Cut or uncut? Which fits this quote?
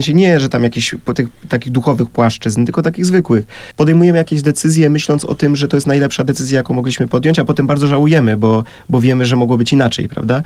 uncut